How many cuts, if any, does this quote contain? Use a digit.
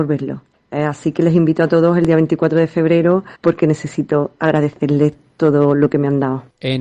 1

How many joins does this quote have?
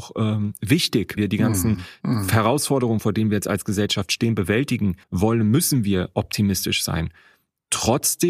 2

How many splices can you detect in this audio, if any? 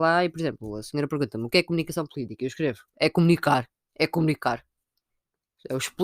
2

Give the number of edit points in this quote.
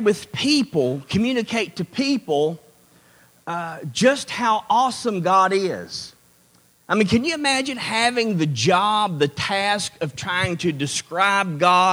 0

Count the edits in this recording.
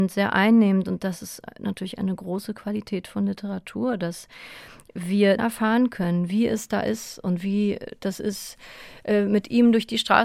1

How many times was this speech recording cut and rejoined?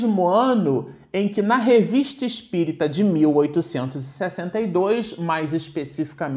0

